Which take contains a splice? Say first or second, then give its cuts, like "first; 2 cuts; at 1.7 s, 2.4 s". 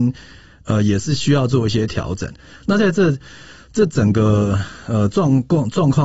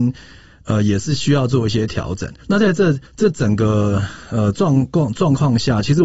second; 2 cuts; at 2.4 s, 3.1 s